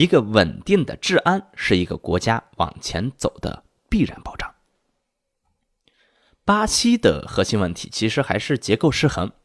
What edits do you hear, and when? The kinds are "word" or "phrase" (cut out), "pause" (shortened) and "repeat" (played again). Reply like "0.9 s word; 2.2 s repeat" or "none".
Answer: none